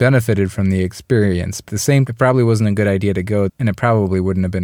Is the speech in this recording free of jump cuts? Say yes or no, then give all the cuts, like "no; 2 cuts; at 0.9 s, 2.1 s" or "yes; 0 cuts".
no; 3 cuts; at 1.7 s, 2.1 s, 3.5 s